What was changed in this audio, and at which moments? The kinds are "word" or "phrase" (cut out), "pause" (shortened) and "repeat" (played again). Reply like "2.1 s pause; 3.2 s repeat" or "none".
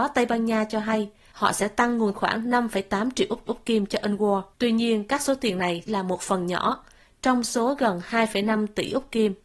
2.1 s phrase; 3.5 s repeat; 4.5 s pause; 5.9 s word